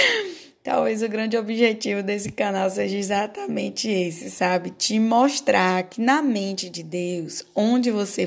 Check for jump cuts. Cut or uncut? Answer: uncut